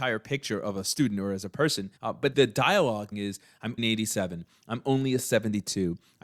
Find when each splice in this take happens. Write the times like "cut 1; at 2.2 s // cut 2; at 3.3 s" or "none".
cut 1; at 2.0 s // cut 2; at 2.3 s // cut 3; at 3.1 s // cut 4; at 3.8 s